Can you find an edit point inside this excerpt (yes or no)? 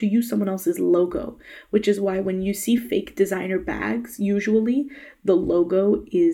no